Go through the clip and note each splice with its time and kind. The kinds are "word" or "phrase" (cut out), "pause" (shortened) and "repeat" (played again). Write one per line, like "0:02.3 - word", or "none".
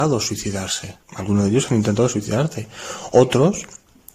0:01.0 - pause